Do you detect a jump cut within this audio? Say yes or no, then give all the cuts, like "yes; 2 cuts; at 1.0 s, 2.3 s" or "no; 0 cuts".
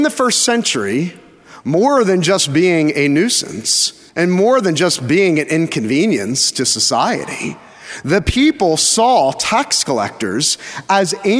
yes; 1 cut; at 4.1 s